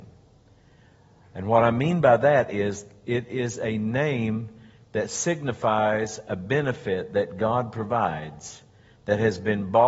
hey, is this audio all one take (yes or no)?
yes